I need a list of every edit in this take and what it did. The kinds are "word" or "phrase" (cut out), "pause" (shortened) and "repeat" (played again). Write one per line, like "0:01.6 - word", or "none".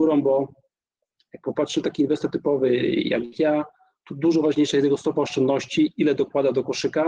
none